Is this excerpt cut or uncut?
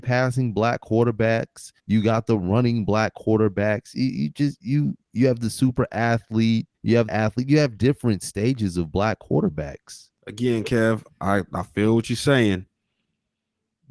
cut